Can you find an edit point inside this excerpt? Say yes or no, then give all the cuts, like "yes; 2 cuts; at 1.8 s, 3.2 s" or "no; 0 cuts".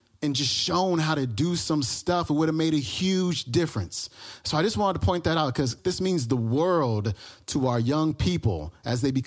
no; 0 cuts